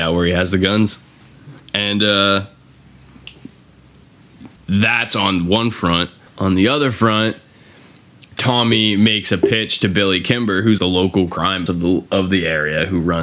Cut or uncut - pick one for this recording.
cut